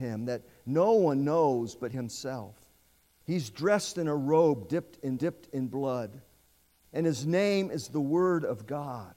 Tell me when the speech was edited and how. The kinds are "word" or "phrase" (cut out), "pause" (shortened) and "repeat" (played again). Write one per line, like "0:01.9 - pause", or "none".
0:01.9 - word
0:05.2 - repeat